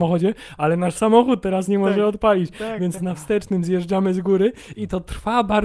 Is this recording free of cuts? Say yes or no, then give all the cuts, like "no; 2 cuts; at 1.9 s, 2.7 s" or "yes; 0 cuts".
no; 1 cut; at 3.0 s